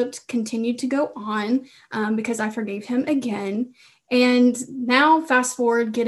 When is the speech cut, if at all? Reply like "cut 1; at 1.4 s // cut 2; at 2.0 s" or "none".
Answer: none